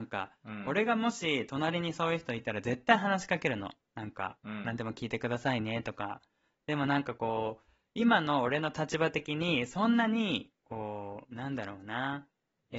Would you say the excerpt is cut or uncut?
uncut